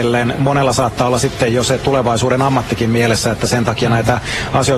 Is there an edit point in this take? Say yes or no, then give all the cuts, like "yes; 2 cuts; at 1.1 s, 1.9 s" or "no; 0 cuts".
no; 0 cuts